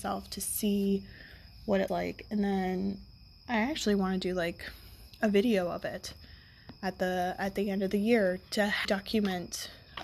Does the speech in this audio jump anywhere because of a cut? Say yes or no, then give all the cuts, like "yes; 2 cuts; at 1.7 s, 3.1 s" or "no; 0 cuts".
yes; 2 cuts; at 1.9 s, 8.8 s